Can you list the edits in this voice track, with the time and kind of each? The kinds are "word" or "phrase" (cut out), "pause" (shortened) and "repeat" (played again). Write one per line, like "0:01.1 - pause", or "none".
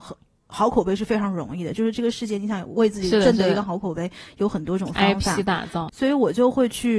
0:05.9 - word